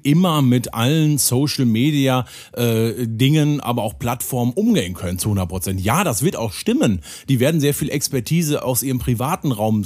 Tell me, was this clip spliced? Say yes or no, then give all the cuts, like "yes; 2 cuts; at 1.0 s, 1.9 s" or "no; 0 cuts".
no; 0 cuts